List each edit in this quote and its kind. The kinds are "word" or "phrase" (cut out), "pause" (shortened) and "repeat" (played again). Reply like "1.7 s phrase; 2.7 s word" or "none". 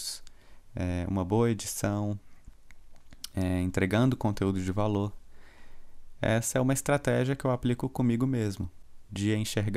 none